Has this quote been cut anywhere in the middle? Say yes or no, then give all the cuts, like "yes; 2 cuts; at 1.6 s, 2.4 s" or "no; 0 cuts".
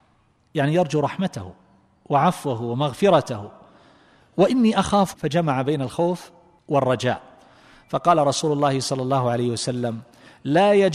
yes; 1 cut; at 5.1 s